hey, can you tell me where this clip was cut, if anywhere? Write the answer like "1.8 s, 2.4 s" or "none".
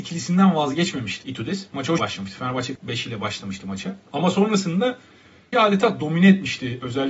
1.2 s, 2.0 s, 2.8 s, 4.0 s, 5.5 s